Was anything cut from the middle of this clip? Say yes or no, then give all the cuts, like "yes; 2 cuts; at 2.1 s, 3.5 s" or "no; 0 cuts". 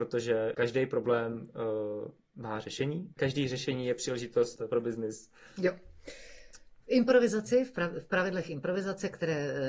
yes; 2 cuts; at 3.1 s, 6.8 s